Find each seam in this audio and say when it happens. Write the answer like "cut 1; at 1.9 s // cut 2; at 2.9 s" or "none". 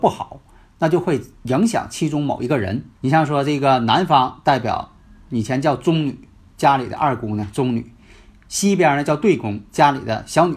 cut 1; at 3.0 s